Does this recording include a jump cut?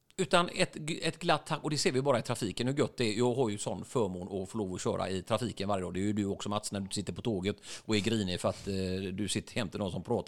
no; 0 cuts

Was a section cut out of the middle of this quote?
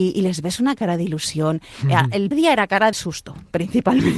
yes; 2 cuts; at 2.3 s, 2.9 s

